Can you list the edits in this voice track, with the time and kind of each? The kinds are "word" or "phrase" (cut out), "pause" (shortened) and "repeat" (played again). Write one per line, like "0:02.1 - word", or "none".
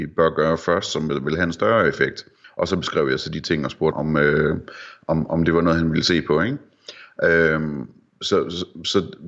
0:02.4 - pause
0:03.9 - word